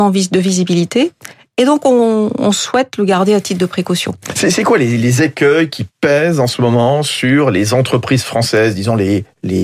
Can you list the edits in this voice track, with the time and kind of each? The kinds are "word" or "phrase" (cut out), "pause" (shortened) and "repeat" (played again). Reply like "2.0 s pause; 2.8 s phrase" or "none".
none